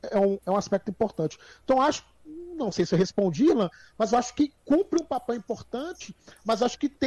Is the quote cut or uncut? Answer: uncut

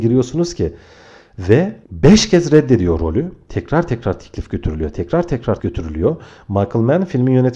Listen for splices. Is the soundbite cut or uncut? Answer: cut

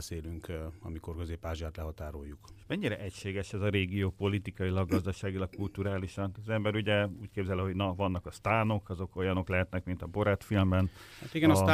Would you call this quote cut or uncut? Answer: uncut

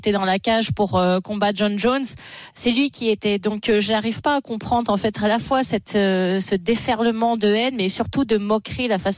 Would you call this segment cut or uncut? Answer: uncut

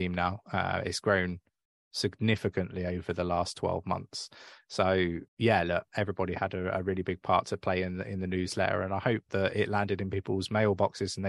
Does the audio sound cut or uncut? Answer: cut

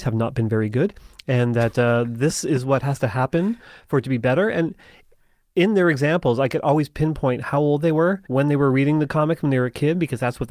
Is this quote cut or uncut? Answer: cut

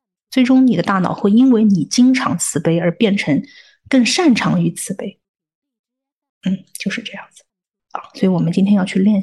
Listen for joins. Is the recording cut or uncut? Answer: uncut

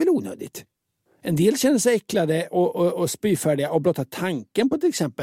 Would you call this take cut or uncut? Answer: uncut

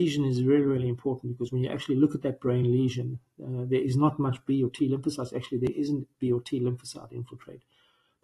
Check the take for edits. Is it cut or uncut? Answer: uncut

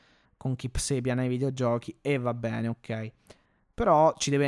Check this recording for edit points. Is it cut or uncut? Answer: uncut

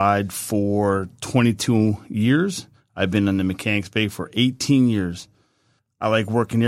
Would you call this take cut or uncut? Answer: uncut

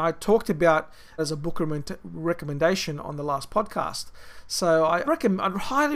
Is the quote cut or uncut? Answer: cut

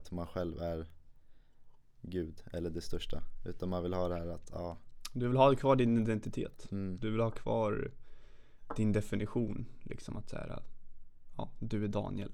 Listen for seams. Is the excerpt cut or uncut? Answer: uncut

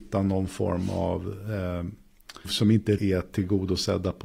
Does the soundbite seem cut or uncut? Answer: cut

